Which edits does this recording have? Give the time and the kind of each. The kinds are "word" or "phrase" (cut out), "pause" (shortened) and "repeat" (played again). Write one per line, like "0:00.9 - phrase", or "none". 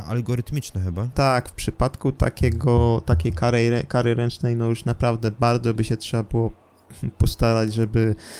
none

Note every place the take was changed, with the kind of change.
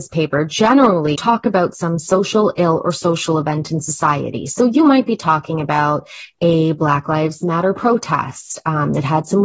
0:01.2 - word

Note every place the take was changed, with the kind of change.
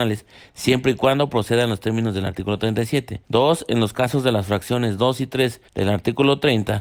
0:03.2 - pause
0:05.7 - pause

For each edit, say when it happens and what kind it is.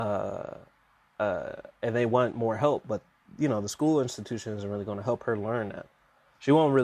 none

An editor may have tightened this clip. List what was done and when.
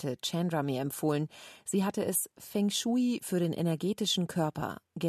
none

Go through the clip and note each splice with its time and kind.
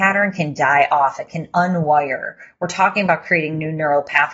none

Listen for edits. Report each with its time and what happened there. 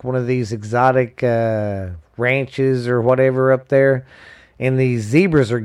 none

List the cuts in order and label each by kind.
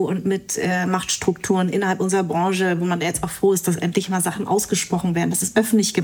none

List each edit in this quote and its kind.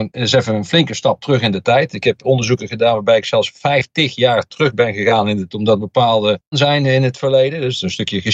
0:05.5 - word
0:06.5 - phrase

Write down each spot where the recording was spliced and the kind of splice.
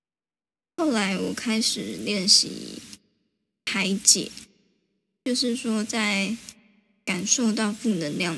none

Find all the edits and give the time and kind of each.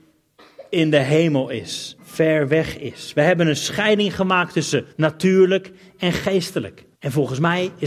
0:02.0 - pause
0:04.9 - pause
0:06.9 - pause

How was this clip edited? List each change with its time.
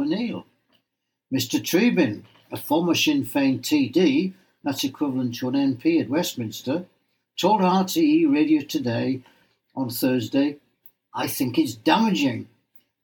none

